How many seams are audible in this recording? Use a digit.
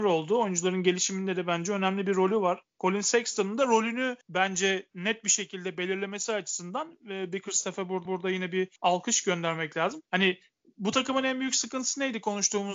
4